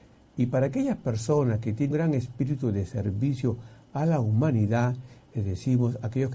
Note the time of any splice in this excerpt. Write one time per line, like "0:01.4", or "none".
0:01.9